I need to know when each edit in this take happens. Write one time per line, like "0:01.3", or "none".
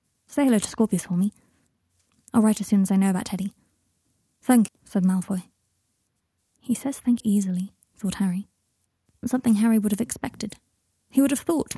0:04.7
0:07.2
0:09.2